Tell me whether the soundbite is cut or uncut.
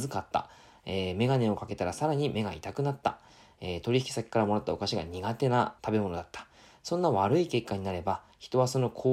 cut